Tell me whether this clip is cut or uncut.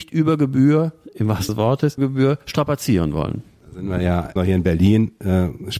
cut